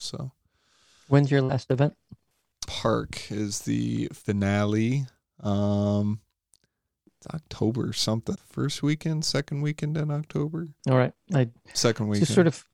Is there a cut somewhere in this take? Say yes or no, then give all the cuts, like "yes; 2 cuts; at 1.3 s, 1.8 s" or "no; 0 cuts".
yes; 4 cuts; at 2.7 s, 4.2 s, 8.3 s, 10.8 s